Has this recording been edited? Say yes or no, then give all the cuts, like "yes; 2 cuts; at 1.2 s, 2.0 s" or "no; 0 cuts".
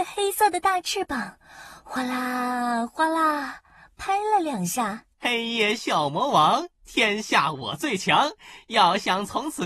yes; 1 cut; at 5.1 s